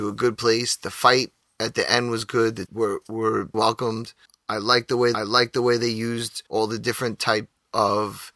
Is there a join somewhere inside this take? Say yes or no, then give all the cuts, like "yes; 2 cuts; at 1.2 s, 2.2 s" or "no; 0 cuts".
yes; 6 cuts; at 1.4 s, 2.7 s, 3.5 s, 4.2 s, 5.1 s, 6.5 s